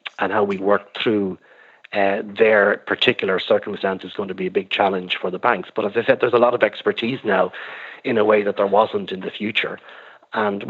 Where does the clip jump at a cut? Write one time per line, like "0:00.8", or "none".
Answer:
none